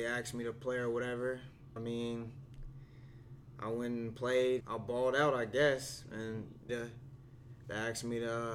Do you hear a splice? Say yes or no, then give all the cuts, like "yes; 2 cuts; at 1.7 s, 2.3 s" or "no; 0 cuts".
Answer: yes; 3 cuts; at 1.8 s, 4.6 s, 6.7 s